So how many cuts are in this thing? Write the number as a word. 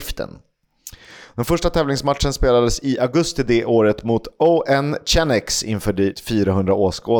one